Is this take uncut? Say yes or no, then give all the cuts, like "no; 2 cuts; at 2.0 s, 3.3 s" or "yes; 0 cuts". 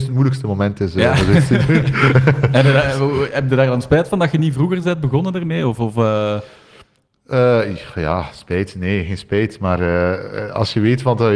yes; 0 cuts